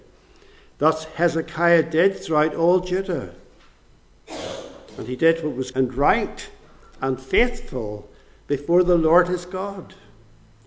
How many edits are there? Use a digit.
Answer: 1